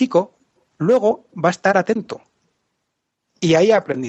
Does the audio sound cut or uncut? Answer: uncut